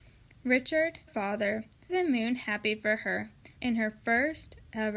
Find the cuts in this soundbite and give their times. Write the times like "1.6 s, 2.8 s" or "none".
1.1 s, 1.9 s, 3.6 s